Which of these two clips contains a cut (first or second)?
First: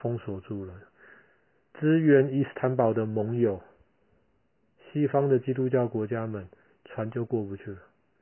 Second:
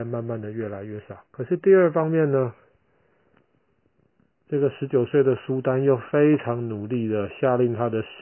second